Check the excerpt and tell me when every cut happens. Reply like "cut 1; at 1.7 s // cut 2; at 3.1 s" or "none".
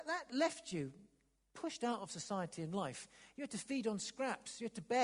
none